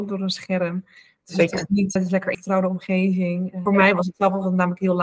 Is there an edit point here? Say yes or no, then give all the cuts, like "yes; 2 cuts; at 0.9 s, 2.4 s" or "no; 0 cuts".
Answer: yes; 3 cuts; at 2.0 s, 2.3 s, 3.7 s